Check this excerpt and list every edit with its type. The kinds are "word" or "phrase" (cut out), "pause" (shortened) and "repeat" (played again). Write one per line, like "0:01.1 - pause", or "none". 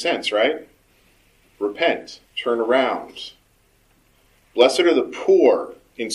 0:02.3 - pause